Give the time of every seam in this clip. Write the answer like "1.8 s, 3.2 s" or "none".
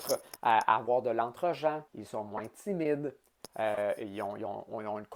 1.9 s

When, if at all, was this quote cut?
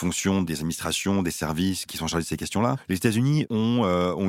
none

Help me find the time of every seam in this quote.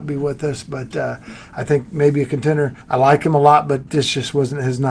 2.8 s, 3.9 s

